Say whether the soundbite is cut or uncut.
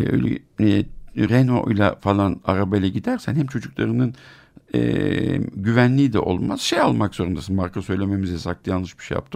uncut